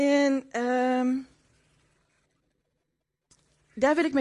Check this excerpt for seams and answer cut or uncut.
uncut